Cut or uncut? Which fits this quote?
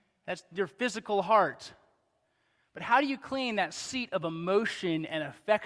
uncut